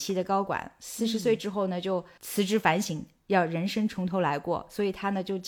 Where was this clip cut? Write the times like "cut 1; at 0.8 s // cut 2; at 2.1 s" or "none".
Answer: none